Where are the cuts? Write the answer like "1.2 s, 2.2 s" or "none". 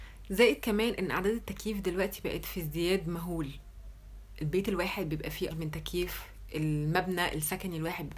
5.5 s

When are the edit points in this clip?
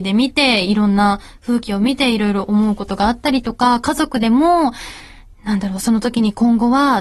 none

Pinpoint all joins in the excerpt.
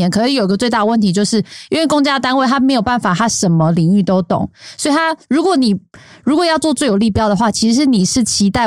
none

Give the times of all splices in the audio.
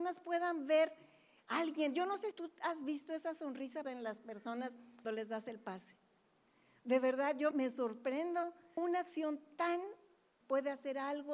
2.3 s, 3.8 s, 5.0 s, 7.5 s, 8.8 s, 10.4 s

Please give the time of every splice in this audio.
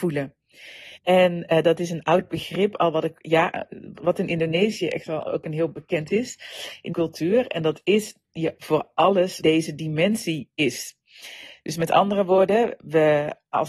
1.0 s, 4.0 s, 6.1 s, 6.9 s, 8.6 s, 9.4 s

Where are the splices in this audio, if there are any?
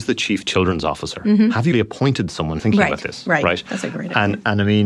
1.7 s, 2.6 s

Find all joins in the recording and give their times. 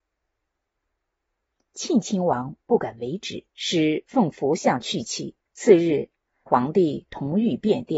3.5 s, 5.5 s, 6.5 s

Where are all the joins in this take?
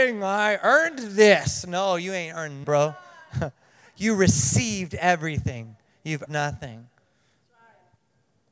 2.6 s, 6.3 s

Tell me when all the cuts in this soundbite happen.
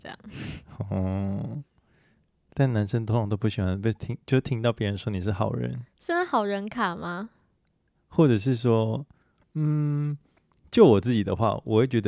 none

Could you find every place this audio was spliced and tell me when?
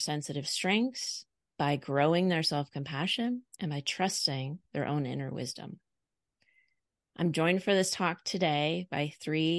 3.5 s

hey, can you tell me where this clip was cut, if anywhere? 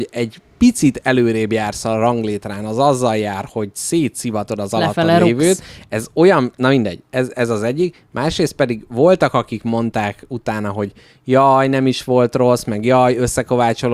none

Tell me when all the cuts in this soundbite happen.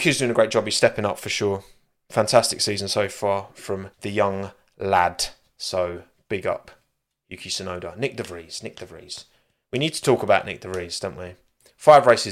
3.9 s

